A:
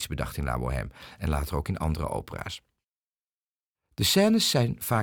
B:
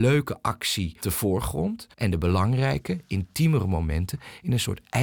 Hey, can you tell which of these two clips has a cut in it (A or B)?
B